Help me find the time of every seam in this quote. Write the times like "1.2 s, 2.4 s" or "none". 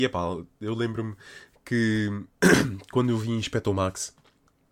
none